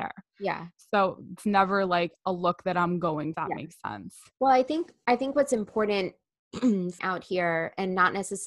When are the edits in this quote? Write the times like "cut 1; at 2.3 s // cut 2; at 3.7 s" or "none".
cut 1; at 1.4 s // cut 2; at 3.3 s // cut 3; at 7.0 s